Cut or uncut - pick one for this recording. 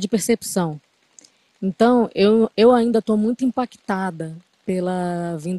uncut